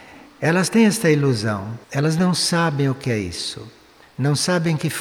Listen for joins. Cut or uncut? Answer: cut